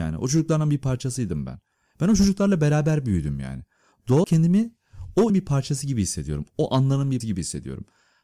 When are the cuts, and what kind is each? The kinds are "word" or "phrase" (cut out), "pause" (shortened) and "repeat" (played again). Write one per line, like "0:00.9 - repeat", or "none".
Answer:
0:04.2 - word
0:05.3 - word
0:07.2 - word